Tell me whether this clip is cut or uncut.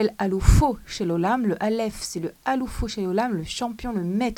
uncut